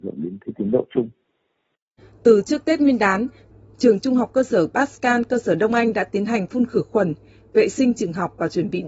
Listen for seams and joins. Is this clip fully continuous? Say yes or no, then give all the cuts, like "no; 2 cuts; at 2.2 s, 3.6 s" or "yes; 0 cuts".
yes; 0 cuts